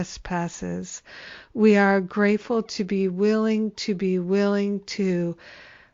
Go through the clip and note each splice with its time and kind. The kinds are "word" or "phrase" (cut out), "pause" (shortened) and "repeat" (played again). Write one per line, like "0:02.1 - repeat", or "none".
none